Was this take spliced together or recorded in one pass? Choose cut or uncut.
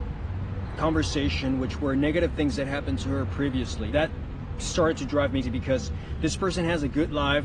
cut